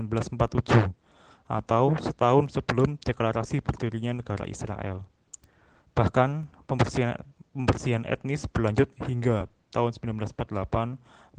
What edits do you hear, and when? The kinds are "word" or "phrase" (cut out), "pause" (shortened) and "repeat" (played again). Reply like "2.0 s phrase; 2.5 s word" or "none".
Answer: none